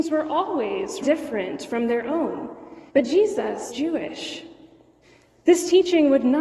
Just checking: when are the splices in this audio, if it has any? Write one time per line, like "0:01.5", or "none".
0:01.0
0:02.9
0:03.7
0:05.0